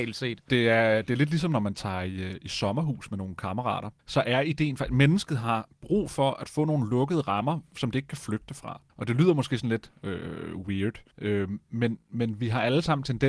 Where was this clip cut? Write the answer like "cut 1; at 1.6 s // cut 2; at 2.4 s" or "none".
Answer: cut 1; at 4.0 s // cut 2; at 8.9 s // cut 3; at 11.1 s